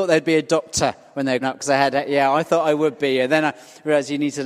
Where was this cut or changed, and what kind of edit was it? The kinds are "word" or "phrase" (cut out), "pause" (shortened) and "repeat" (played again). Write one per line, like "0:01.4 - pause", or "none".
0:01.4 - word